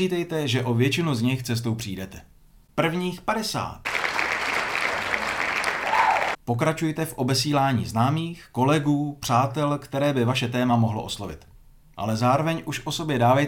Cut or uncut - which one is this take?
uncut